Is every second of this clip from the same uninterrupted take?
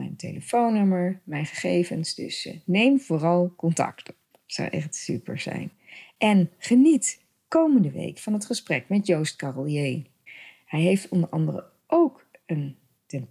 yes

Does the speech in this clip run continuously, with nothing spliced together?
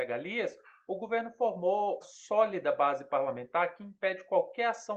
no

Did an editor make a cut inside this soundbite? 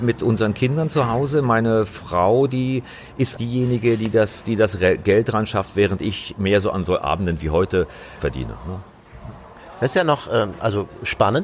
yes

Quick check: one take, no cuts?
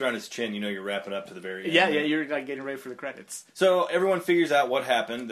yes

